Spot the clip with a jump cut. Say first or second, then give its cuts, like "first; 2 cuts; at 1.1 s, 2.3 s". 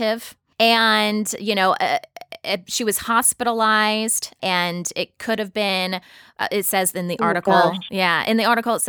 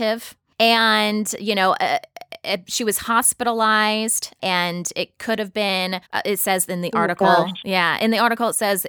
second; 1 cut; at 6.0 s